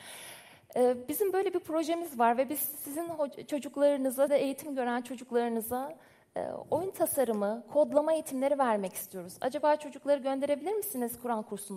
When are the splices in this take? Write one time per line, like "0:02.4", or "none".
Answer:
0:04.3

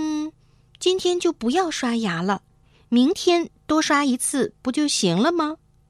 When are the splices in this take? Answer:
none

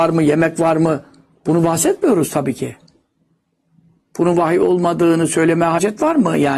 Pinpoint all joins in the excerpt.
none

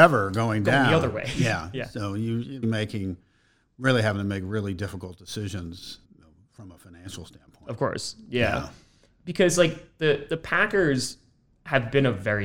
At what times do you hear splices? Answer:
0:02.6
0:06.0

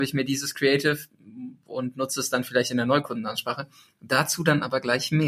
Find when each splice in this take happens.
none

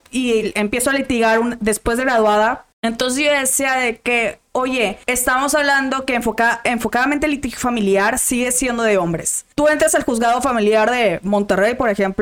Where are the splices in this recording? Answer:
0:02.7
0:05.0
0:09.5

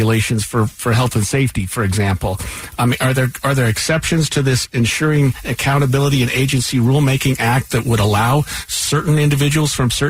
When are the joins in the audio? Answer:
none

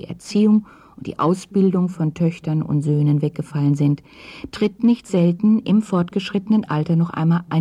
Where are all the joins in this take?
none

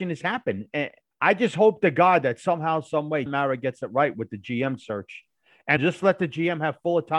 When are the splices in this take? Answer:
0:01.1
0:03.3
0:05.8

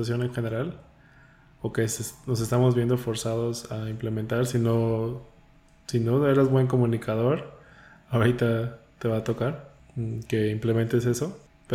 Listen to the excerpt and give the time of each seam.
none

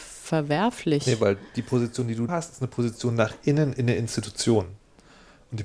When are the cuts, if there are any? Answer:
0:01.5
0:02.3

